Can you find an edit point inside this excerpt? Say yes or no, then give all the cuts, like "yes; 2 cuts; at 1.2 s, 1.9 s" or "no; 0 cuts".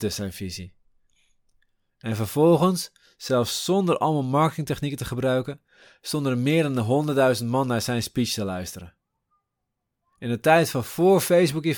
no; 0 cuts